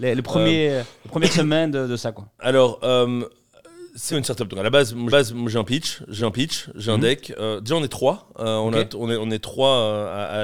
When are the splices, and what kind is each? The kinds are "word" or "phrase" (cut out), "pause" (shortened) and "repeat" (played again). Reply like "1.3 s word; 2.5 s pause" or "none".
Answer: 4.1 s word; 5.1 s repeat; 6.2 s repeat